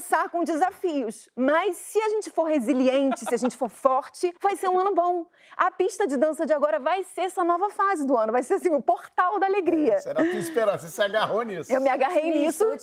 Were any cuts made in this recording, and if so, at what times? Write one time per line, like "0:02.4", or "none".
0:04.4